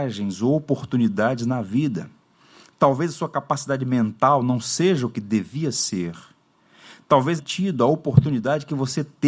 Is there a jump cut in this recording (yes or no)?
yes